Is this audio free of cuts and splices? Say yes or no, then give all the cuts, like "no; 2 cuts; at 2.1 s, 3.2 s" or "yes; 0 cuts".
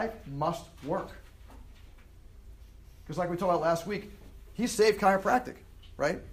yes; 0 cuts